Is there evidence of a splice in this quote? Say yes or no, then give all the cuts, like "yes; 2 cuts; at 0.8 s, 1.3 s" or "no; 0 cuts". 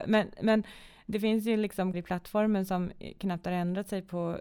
yes; 1 cut; at 1.9 s